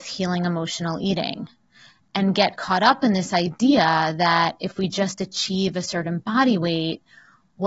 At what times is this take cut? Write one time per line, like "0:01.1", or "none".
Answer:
none

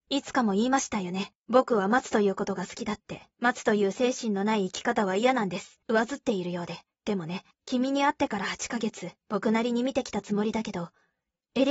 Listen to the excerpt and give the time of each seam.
0:01.3
0:03.3
0:05.8
0:06.9
0:07.5
0:09.2

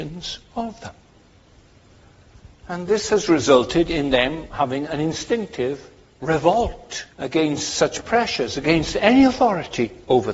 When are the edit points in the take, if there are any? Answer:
0:07.1

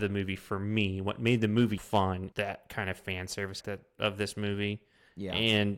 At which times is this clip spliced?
0:01.8
0:02.3
0:03.6

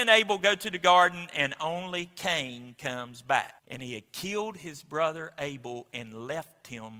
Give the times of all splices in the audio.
0:03.6

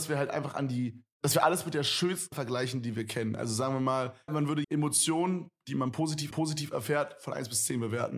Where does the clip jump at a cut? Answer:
0:01.1
0:02.3
0:04.3
0:04.6
0:06.3

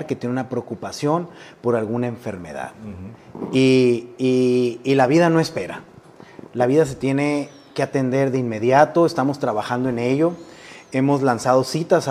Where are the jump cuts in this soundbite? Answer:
none

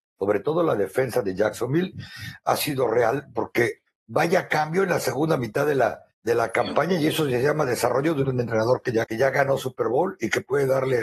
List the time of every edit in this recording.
0:03.9
0:06.1
0:08.2
0:09.0

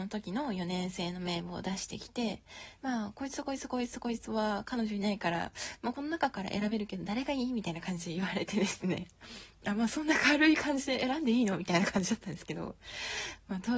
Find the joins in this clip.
none

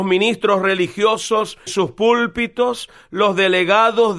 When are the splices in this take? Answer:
0:01.7

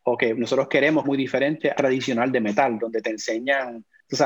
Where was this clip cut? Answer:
0:01.0
0:01.7

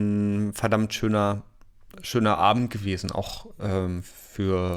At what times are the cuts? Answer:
none

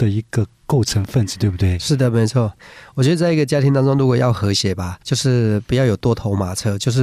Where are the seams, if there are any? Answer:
0:05.0

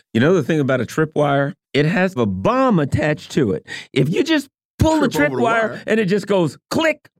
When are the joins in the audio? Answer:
0:01.6
0:02.2

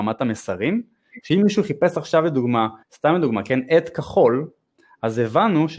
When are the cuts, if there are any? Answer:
0:02.8

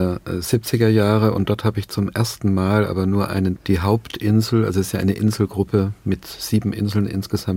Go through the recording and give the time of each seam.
0:03.6

